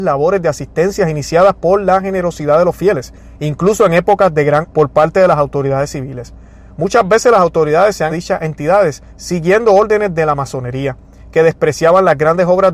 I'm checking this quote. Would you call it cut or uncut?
cut